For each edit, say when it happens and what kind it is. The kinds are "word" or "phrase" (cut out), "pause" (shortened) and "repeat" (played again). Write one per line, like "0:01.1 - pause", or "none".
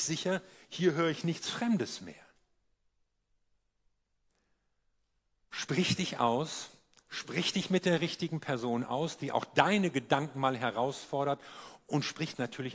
none